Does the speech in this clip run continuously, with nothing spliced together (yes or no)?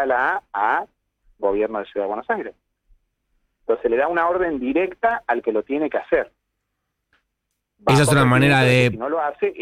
yes